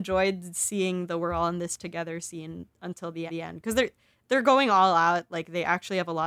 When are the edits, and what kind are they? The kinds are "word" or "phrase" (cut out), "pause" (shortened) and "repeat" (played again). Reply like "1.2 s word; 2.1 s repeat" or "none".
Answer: 2.7 s pause; 3.3 s repeat